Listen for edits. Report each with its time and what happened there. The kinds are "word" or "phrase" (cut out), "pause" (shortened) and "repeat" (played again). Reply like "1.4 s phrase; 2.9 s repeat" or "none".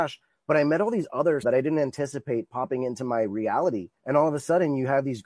1.4 s phrase; 4.0 s pause

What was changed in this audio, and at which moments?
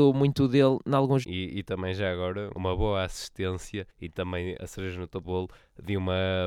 1.2 s phrase; 2.5 s word; 3.9 s pause; 4.6 s word; 5.2 s word

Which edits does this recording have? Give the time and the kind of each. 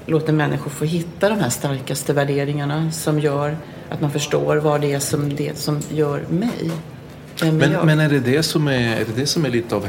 none

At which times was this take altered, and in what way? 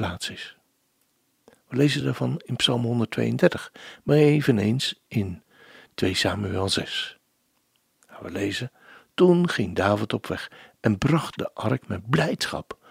none

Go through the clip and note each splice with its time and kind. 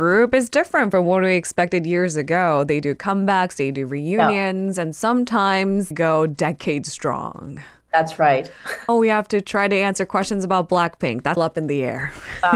5.9 s word; 8.9 s phrase; 11.4 s word

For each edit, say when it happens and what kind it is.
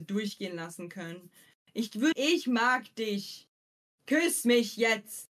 2.1 s word

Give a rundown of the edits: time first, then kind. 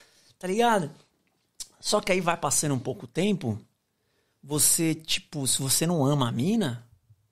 none

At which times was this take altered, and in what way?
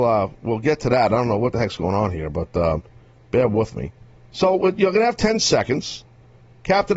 none

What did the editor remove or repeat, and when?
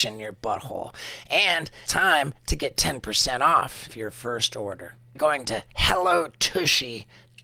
1.9 s word; 5.2 s word

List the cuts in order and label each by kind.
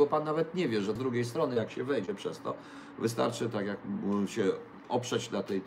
1.0 s word

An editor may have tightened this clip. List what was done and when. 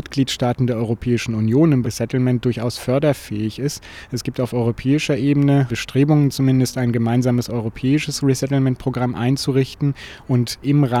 1.8 s word

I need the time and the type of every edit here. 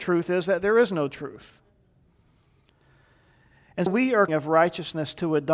3.9 s word; 4.3 s phrase

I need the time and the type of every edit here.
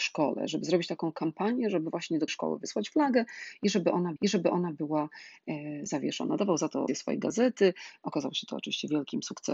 2.3 s word; 4.2 s repeat; 6.9 s phrase

